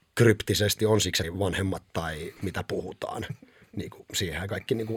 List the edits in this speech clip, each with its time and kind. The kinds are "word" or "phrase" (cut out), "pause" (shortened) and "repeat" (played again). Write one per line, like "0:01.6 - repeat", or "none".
0:01.2 - word
0:02.4 - phrase